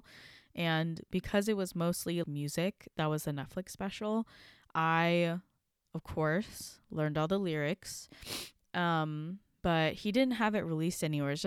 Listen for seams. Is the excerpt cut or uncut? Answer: cut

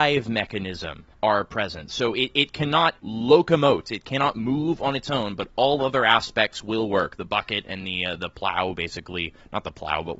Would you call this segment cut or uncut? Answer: cut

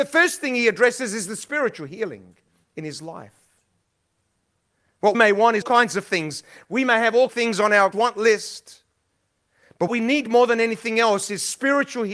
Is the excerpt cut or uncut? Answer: cut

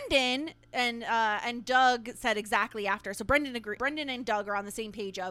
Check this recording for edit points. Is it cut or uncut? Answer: cut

